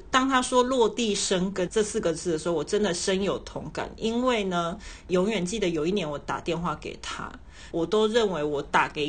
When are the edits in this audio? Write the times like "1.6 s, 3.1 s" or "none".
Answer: 7.7 s